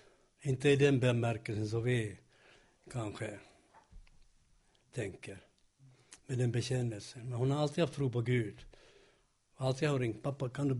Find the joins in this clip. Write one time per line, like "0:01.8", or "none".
none

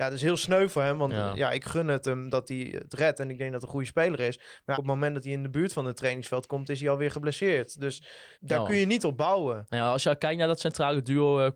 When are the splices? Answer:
0:04.7
0:08.3

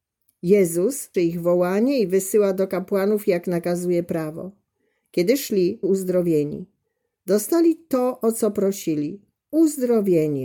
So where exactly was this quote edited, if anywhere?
0:01.1
0:05.8

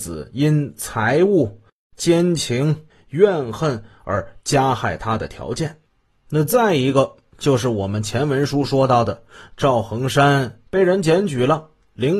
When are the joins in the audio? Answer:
0:10.7

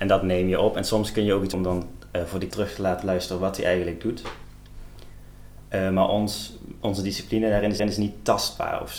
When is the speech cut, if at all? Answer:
0:01.5
0:02.5
0:06.8
0:07.8

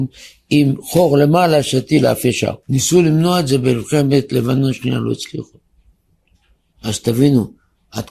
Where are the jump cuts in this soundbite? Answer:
0:02.6

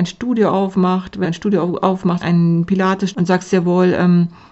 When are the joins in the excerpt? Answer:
0:01.2
0:02.2
0:03.1

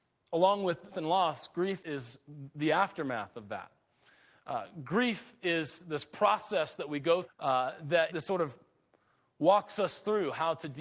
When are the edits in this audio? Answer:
0:00.9
0:01.8
0:05.8
0:07.2
0:08.1

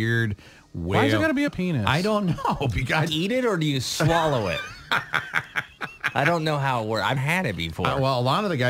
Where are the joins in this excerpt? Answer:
0:01.5
0:03.1
0:07.2

